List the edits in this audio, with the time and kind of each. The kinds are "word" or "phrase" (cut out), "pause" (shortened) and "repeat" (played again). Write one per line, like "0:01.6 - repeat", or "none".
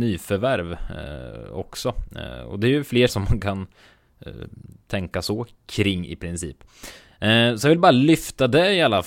0:03.1 - word

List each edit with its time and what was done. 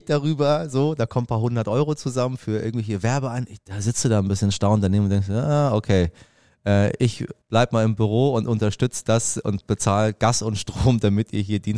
0:07.4 - pause

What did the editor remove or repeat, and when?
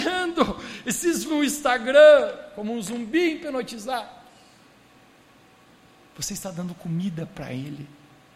0:01.2 - word

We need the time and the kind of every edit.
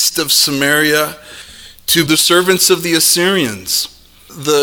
0:02.1 - word

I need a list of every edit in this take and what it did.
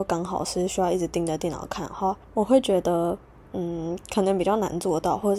0:02.2 - pause

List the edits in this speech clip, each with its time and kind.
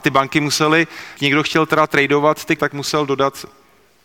0:01.2 - word
0:02.6 - word

